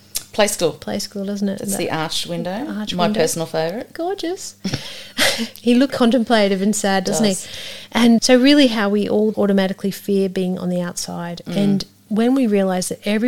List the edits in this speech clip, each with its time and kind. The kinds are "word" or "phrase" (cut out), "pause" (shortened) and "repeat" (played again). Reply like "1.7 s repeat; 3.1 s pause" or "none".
5.9 s word; 8.2 s word; 9.3 s word